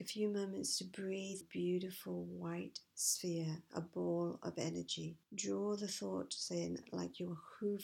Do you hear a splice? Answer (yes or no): yes